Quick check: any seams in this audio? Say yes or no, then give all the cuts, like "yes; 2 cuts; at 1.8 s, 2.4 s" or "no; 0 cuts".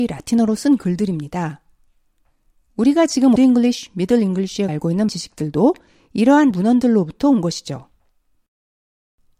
yes; 4 cuts; at 3.4 s, 4.7 s, 5.1 s, 6.5 s